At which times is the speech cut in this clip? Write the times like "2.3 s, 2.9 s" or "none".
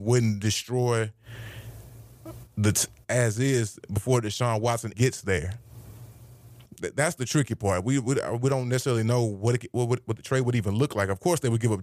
3.0 s, 4.9 s, 6.6 s